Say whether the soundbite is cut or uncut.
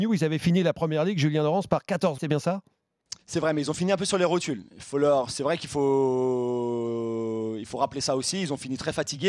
cut